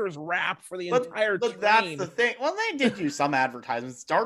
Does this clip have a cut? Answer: no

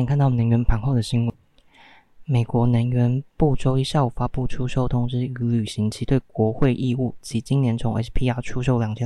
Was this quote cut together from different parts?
no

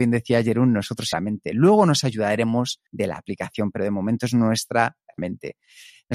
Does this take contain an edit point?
yes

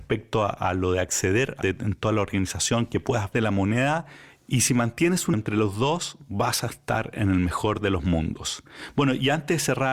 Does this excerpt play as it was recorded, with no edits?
no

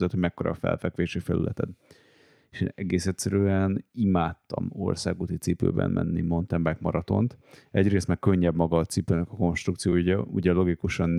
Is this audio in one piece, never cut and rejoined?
yes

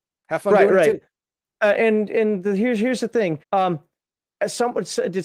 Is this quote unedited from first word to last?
no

